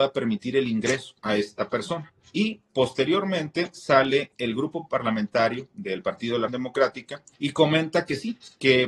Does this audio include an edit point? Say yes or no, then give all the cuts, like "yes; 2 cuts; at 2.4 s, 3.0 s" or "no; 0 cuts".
yes; 5 cuts; at 1.2 s, 2.2 s, 4.3 s, 6.5 s, 7.3 s